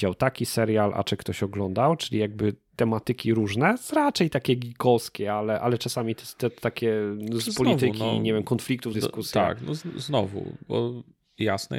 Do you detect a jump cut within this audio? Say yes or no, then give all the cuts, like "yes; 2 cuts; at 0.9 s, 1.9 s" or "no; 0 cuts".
yes; 1 cut; at 8.9 s